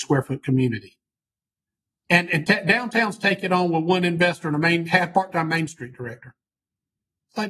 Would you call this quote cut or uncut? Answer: uncut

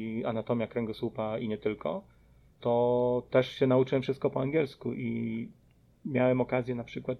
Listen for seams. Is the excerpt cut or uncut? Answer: uncut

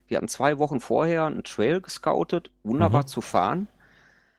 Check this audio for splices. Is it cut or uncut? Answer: uncut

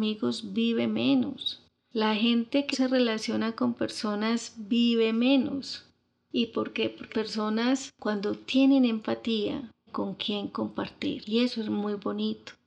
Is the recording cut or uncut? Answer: cut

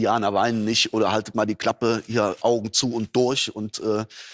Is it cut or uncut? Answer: uncut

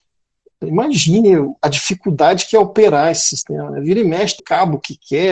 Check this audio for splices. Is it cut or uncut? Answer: cut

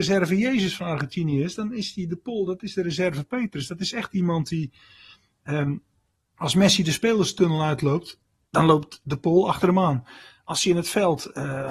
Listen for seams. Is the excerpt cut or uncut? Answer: uncut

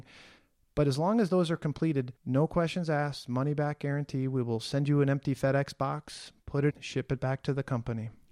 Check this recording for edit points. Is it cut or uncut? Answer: cut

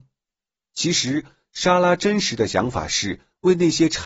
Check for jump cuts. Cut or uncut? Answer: uncut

